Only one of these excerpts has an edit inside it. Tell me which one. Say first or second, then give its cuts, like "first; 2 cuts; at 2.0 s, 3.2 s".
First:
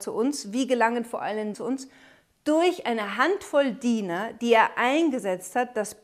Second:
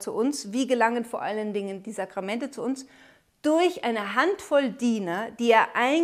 first; 1 cut; at 1.5 s